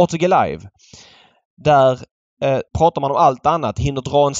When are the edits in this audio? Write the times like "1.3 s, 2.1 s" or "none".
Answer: 2.7 s